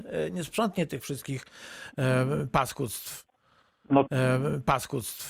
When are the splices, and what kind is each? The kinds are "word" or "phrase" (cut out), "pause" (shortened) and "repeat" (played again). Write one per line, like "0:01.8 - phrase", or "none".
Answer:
0:04.1 - repeat